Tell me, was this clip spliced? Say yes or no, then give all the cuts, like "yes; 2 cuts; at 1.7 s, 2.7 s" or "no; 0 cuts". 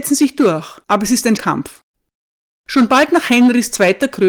yes; 1 cut; at 1.4 s